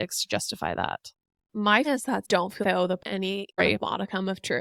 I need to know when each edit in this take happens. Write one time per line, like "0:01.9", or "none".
0:01.8
0:02.2
0:02.6
0:03.0
0:03.6